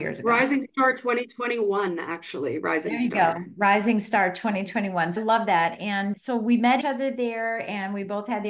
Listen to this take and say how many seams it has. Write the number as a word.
three